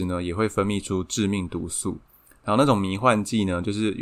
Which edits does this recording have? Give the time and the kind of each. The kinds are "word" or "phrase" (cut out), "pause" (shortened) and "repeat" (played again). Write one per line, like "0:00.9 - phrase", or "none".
none